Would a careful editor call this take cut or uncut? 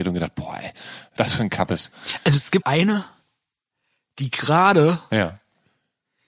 cut